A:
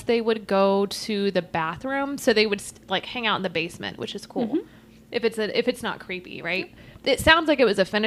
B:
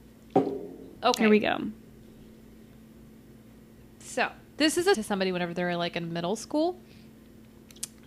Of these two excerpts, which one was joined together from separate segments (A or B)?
B